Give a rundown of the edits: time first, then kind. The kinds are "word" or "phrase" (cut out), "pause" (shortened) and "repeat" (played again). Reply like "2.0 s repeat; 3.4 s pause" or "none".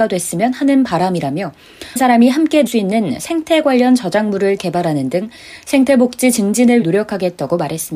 2.0 s word; 2.7 s word; 4.6 s word; 6.8 s word